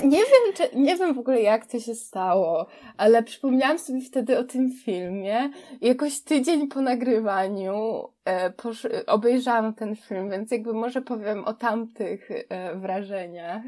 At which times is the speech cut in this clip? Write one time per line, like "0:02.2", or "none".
none